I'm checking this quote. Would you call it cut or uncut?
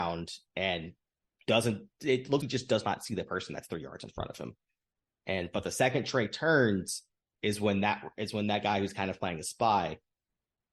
cut